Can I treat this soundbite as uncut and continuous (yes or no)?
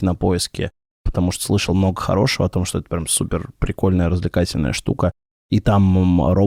yes